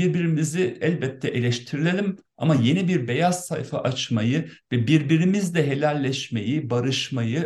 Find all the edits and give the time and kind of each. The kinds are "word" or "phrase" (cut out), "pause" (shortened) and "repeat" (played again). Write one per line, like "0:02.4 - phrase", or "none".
none